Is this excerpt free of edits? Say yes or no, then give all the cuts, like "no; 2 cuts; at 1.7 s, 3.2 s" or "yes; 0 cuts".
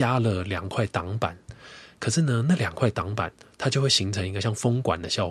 yes; 0 cuts